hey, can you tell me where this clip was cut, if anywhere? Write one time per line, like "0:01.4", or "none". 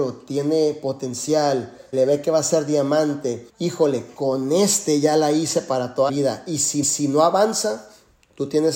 0:01.9
0:03.5
0:06.1
0:06.8